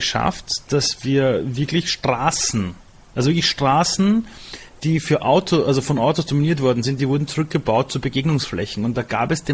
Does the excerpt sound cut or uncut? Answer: uncut